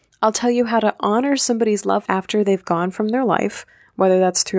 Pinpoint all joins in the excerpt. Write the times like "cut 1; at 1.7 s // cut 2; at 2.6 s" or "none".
cut 1; at 2.1 s